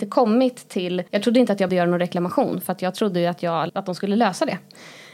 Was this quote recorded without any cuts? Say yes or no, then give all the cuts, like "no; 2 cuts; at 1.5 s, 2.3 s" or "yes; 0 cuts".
no; 3 cuts; at 1.1 s, 1.7 s, 3.7 s